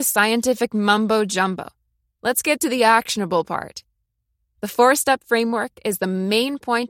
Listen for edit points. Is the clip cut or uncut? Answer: uncut